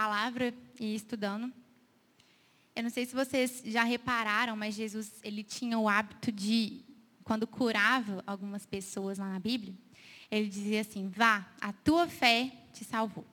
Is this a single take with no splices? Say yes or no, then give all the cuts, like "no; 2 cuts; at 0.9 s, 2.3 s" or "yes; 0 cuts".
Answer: yes; 0 cuts